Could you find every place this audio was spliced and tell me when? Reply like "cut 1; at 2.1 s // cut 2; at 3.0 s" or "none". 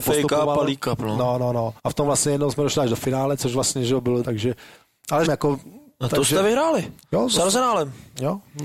cut 1; at 1.8 s // cut 2; at 4.2 s // cut 3; at 5.3 s // cut 4; at 7.0 s